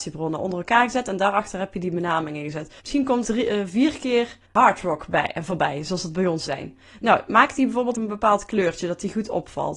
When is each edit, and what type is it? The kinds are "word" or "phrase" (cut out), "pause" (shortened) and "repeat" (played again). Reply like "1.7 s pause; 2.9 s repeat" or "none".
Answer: 2.8 s pause; 3.2 s word; 4.4 s pause; 6.5 s word; 7.9 s word